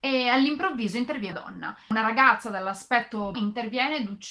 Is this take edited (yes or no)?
yes